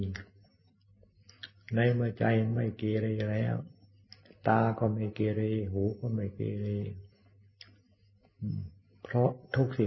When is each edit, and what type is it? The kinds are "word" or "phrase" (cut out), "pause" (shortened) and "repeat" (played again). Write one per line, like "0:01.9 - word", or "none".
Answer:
none